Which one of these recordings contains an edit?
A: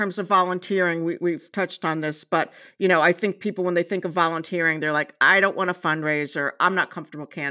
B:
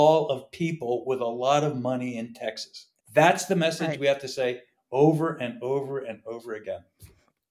B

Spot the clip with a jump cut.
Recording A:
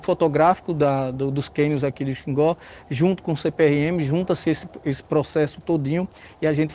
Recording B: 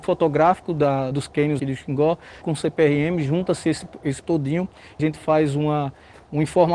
B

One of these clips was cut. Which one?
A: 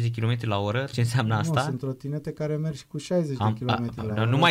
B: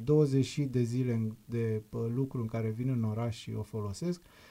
A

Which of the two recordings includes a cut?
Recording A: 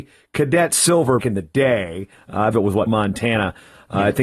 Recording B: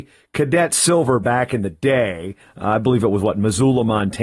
A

